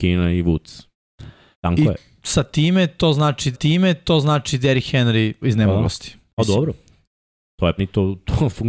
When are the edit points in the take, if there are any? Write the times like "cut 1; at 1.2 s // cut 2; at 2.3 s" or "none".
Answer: cut 1; at 3.5 s // cut 2; at 5.4 s // cut 3; at 7.8 s